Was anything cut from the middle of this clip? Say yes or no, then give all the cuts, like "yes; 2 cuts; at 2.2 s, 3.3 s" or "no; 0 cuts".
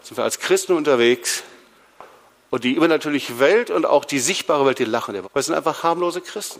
yes; 1 cut; at 5.2 s